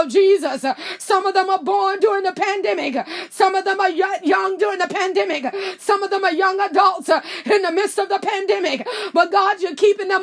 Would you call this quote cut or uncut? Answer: uncut